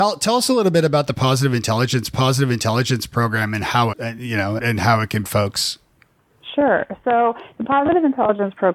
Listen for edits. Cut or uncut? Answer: cut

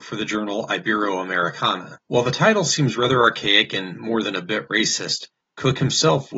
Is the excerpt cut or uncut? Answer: cut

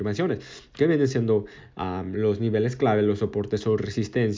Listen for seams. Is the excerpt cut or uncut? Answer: uncut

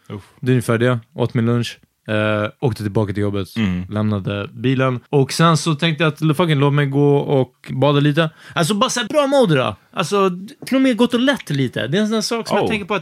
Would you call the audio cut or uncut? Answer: cut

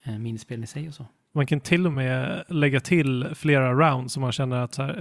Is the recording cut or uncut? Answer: uncut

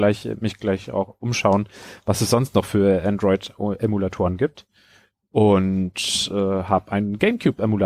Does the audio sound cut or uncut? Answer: uncut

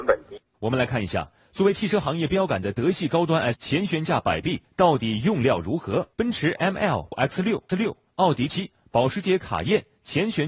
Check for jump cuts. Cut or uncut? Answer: cut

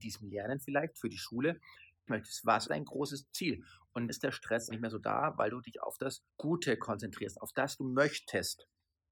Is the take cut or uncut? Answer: cut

